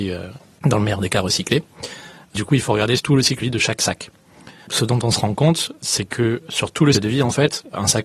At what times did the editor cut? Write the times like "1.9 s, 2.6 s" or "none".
3.0 s, 3.4 s, 6.4 s, 6.9 s